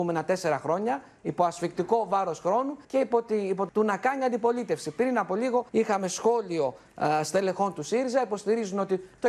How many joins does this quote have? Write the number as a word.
three